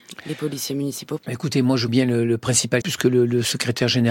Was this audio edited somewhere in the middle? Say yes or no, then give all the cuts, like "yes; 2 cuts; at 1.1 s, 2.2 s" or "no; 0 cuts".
yes; 3 cuts; at 1.2 s, 1.9 s, 2.8 s